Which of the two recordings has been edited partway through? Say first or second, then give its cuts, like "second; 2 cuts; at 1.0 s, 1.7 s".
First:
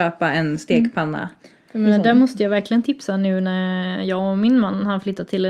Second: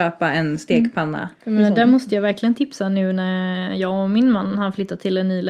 second; 1 cut; at 1.3 s